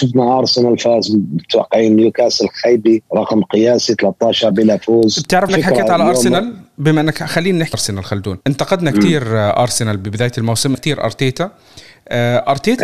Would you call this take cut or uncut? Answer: cut